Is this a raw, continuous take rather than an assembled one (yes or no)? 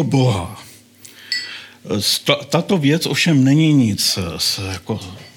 yes